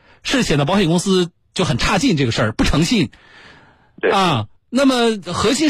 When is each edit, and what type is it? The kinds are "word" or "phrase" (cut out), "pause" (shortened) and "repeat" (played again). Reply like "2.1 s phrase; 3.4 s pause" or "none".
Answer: 4.6 s pause